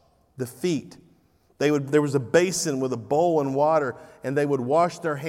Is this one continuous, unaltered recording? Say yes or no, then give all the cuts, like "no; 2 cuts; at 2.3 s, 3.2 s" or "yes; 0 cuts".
yes; 0 cuts